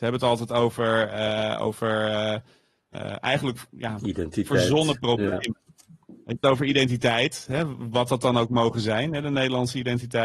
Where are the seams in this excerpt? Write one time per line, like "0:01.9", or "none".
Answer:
0:06.4